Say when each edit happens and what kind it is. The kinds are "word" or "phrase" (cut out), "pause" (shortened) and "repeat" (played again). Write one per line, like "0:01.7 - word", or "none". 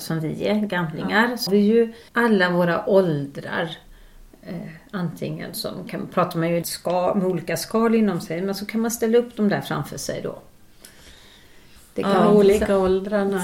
0:01.5 - word
0:02.1 - pause
0:06.6 - phrase
0:11.8 - pause